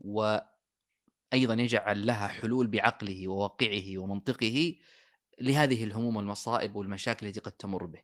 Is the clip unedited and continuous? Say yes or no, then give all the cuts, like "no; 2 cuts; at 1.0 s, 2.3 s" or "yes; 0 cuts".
yes; 0 cuts